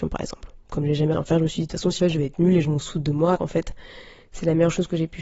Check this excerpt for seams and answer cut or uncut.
cut